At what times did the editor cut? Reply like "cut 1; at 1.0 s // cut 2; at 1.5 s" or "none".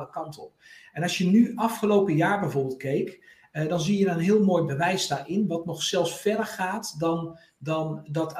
none